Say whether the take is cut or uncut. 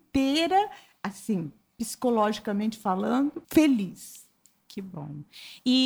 cut